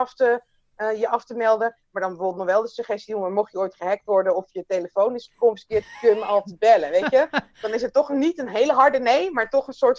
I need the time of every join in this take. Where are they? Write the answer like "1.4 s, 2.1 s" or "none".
none